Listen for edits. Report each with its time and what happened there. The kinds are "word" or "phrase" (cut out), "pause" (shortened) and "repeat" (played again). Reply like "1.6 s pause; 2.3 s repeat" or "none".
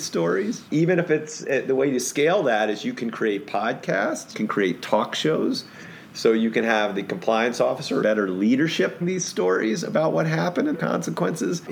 4.3 s word; 8.0 s word; 9.0 s word; 10.7 s word